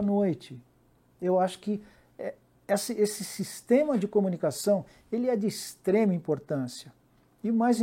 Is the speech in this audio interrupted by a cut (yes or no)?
no